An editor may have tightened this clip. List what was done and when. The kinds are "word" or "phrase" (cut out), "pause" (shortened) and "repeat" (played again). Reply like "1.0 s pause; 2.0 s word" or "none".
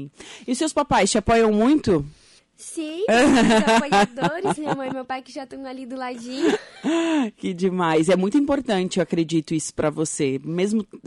2.4 s pause